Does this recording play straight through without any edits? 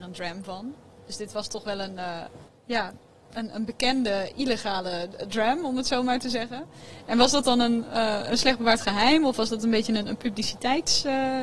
yes; 0 cuts

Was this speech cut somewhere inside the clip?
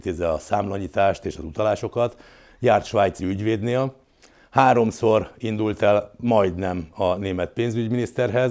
no; 0 cuts

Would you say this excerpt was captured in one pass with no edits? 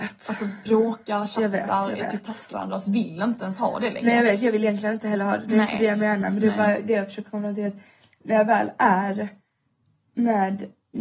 no; 2 cuts; at 2.5 s, 2.9 s

